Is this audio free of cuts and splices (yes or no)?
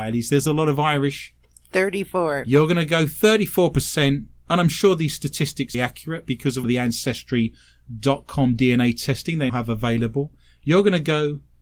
no